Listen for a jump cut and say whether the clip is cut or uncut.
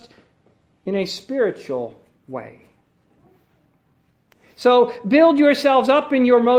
uncut